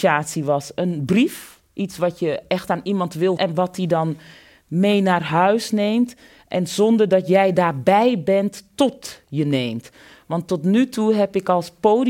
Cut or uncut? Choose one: cut